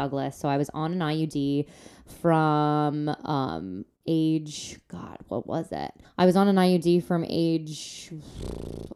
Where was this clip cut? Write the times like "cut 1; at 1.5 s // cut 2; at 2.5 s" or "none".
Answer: cut 1; at 6.0 s